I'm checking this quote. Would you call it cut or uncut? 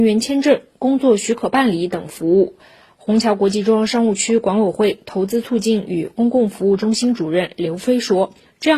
uncut